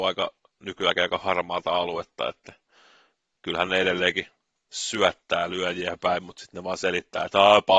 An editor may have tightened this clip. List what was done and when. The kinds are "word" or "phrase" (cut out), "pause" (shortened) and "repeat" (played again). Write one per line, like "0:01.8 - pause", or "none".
none